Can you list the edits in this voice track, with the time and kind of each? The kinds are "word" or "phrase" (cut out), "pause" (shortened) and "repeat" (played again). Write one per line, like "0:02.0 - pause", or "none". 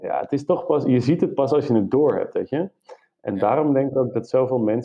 none